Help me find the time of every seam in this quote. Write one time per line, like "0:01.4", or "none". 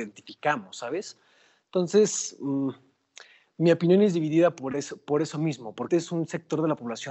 0:05.9